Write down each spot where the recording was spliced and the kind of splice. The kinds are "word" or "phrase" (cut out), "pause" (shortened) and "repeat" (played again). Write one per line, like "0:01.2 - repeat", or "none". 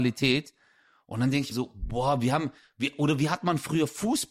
0:01.5 - word